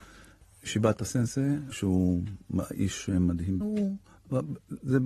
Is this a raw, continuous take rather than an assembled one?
no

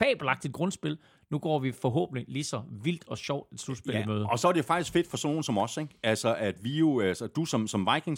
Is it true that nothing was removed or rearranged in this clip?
yes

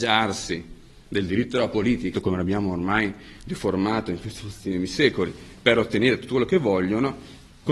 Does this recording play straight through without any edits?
no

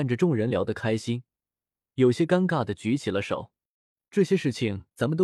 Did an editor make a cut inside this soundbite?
no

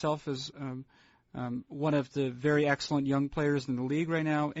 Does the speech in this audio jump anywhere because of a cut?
no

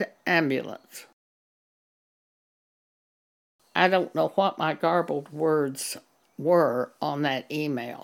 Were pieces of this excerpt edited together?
no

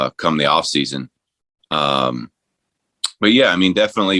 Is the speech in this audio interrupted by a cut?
no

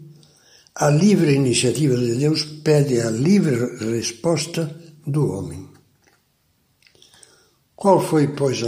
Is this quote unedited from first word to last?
yes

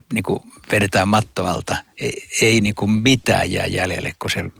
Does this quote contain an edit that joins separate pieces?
yes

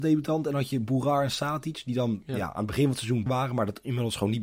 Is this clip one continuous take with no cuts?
no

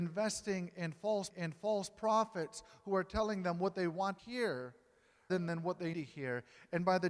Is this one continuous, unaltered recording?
no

